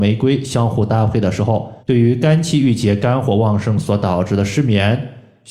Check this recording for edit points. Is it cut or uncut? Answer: cut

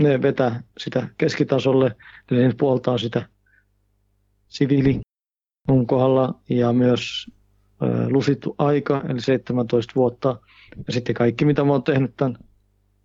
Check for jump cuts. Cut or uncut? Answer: uncut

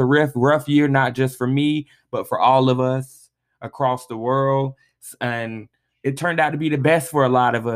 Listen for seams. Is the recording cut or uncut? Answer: uncut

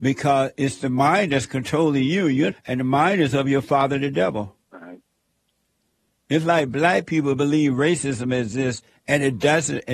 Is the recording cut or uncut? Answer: cut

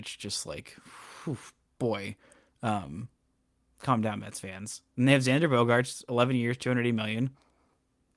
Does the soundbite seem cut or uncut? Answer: uncut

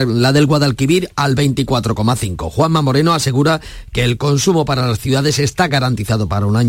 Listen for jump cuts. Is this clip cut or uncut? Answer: uncut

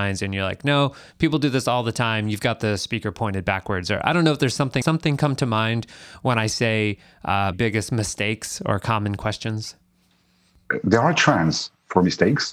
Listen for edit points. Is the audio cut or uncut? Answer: cut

